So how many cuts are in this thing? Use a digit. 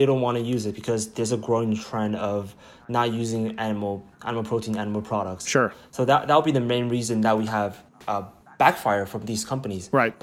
0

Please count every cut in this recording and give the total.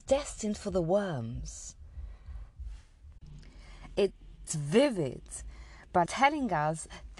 2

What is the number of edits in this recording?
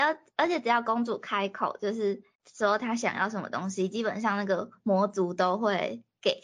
1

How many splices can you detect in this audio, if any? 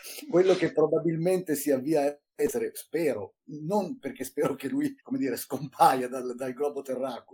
1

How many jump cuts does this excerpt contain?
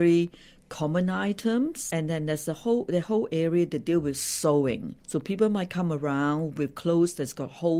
1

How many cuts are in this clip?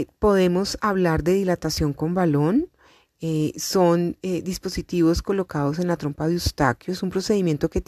0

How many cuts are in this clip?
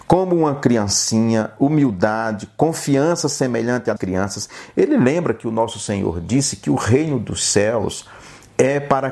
1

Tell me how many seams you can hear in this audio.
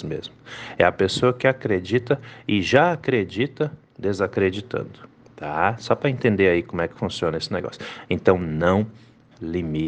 0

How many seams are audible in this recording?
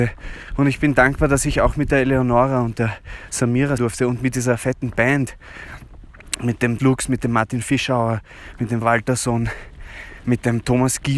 3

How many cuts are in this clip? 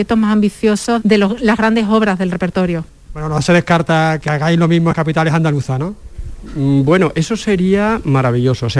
2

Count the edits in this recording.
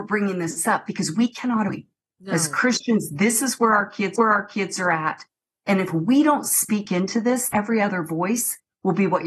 3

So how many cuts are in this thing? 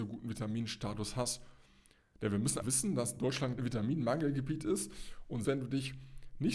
3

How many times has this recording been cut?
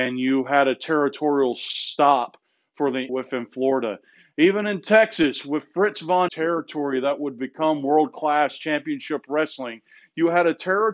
2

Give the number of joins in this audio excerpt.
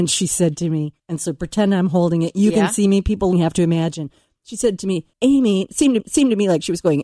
4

